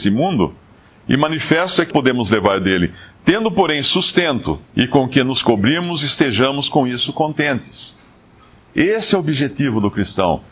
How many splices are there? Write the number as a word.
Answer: two